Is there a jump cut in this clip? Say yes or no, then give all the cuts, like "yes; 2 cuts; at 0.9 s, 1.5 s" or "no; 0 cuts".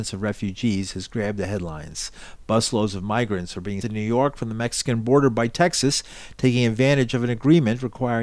yes; 1 cut; at 3.8 s